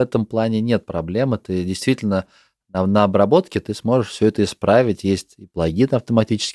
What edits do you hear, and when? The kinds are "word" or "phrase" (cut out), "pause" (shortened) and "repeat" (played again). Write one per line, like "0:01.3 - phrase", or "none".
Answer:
none